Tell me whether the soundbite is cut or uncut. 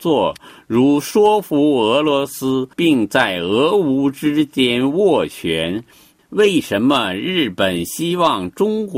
cut